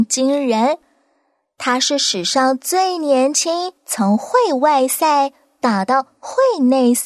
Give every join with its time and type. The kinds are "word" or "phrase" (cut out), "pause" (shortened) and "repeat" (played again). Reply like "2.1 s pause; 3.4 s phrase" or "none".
3.8 s pause